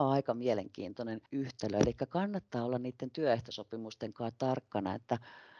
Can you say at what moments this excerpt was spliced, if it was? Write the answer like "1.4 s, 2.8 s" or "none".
1.3 s